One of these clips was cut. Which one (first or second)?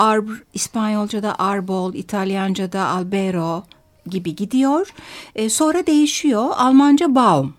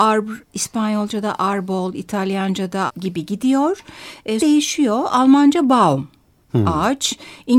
second